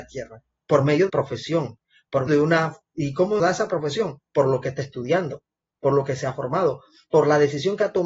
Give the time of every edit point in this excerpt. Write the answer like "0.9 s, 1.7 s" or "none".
1.1 s, 2.3 s, 3.4 s